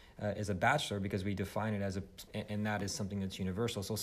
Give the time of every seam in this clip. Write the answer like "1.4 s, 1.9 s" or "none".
2.3 s